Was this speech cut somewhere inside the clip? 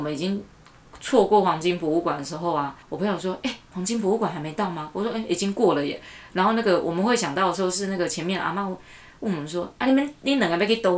yes; 1 cut; at 2.8 s

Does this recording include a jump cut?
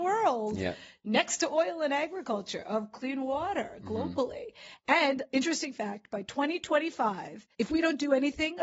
yes; 1 cut; at 7.5 s

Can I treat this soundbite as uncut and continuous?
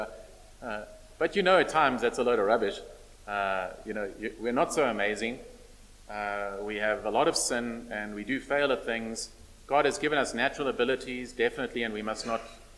yes; 0 cuts

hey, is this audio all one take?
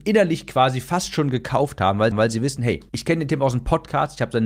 no; 2 cuts; at 2.1 s, 2.9 s

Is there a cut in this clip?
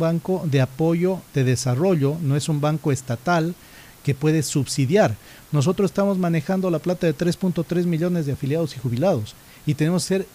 no; 0 cuts

